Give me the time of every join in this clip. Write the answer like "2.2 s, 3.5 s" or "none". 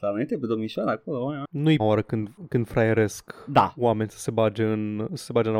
1.8 s

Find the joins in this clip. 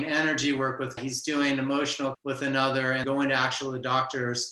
1.0 s, 2.1 s, 3.0 s

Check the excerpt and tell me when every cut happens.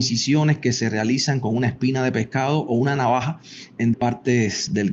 3.9 s

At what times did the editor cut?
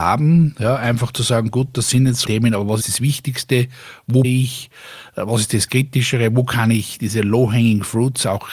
2.2 s, 2.8 s, 4.2 s

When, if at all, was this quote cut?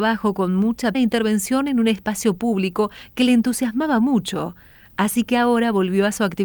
0.9 s

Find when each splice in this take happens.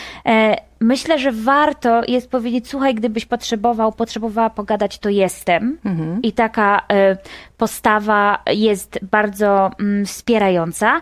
none

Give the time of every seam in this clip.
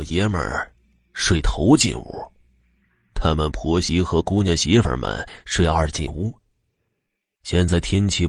none

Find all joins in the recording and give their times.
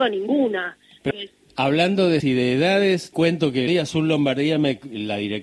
1.1 s, 2.2 s, 3.1 s, 3.7 s

